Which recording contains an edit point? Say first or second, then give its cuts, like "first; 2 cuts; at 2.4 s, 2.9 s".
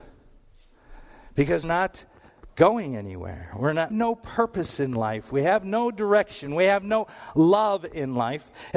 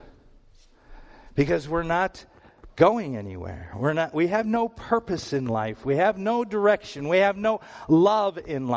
first; 2 cuts; at 1.6 s, 3.9 s